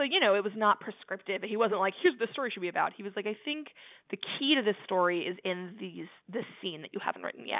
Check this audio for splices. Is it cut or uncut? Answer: uncut